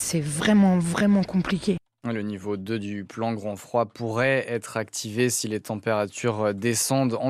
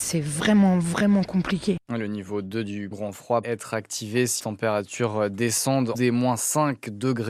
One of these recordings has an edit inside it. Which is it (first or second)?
second